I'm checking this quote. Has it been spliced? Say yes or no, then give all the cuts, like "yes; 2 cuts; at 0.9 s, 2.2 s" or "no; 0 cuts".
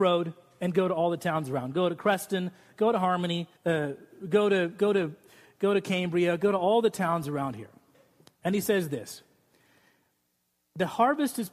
yes; 1 cut; at 3.5 s